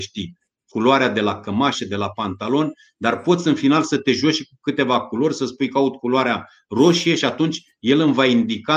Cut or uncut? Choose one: uncut